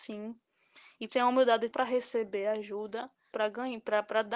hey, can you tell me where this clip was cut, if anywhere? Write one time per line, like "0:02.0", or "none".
0:01.1
0:01.7
0:03.3